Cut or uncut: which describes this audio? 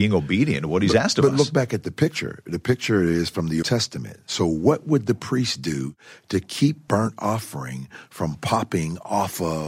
cut